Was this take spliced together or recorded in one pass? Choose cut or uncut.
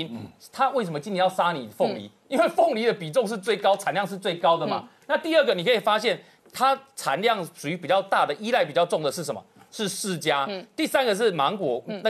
uncut